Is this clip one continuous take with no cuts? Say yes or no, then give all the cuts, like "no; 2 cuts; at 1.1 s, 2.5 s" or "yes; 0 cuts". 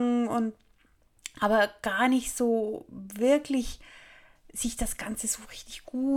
yes; 0 cuts